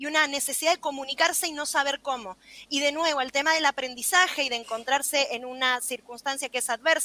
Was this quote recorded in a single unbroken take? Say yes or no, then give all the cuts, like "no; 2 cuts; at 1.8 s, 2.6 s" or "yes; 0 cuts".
yes; 0 cuts